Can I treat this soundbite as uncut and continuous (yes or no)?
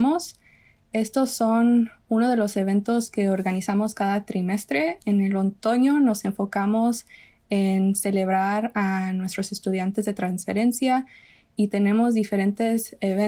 yes